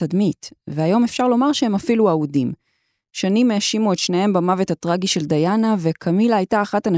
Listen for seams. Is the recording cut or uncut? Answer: uncut